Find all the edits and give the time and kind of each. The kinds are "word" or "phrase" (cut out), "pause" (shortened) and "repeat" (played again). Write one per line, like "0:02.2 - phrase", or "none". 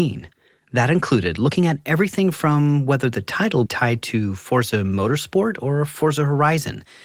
0:03.7 - phrase